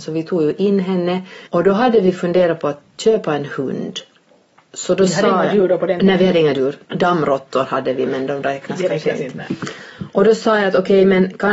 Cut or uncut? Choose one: cut